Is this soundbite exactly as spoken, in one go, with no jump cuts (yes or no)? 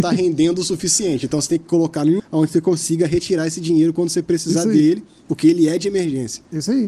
no